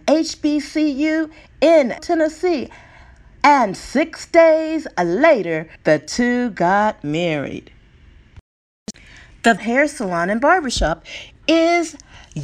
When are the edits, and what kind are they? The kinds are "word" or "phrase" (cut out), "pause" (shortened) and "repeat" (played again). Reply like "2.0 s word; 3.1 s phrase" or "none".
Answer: 2.0 s word; 5.8 s pause; 9.6 s word